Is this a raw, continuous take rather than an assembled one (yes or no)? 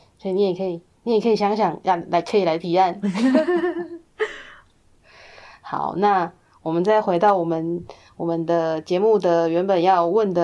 yes